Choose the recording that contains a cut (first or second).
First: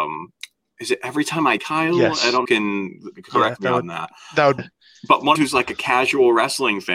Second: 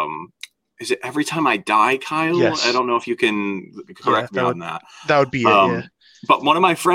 first